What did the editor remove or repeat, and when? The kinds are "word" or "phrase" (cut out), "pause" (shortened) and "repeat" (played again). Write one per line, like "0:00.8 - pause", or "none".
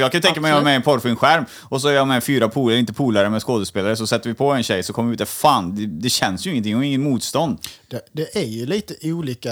none